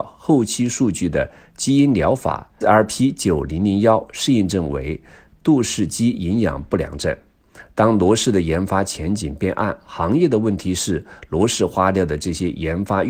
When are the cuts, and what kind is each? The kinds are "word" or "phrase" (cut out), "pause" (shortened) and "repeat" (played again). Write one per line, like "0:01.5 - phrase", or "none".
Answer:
0:02.6 - word